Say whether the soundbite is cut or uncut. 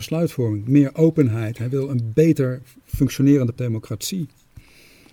cut